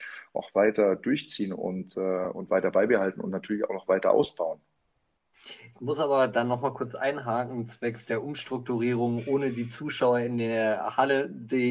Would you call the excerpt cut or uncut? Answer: uncut